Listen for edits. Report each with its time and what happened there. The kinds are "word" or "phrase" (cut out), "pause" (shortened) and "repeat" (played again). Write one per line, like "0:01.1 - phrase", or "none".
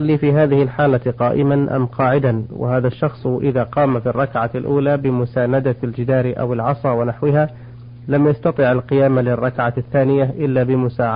none